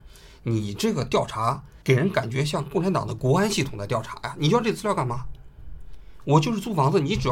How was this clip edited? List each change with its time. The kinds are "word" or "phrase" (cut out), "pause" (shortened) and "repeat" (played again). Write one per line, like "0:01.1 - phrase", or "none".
0:01.8 - pause